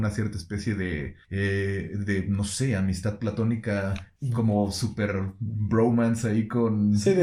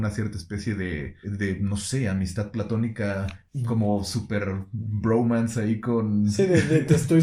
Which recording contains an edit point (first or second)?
second